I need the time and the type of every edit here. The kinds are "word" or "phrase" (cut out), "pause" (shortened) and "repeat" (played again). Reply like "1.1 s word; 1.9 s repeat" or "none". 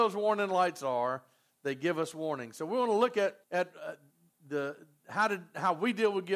3.4 s pause; 4.1 s pause